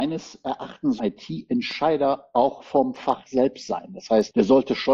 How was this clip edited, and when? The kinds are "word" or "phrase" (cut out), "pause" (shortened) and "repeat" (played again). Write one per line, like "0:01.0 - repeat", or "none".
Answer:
0:01.0 - word